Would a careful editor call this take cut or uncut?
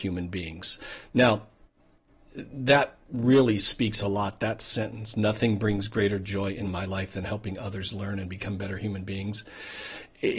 uncut